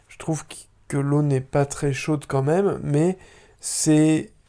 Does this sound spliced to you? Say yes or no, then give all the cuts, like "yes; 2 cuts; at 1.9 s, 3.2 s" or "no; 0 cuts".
no; 0 cuts